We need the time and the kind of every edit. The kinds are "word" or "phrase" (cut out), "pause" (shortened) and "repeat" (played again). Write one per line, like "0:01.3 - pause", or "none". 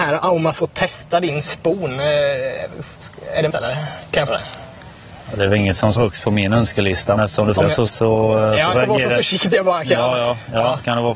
0:03.5 - word
0:04.3 - word
0:05.9 - word
0:07.2 - word
0:07.6 - word
0:07.9 - word
0:08.7 - word